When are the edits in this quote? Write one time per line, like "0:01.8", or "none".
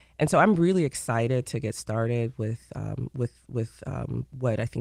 none